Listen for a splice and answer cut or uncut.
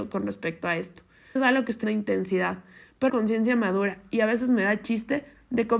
cut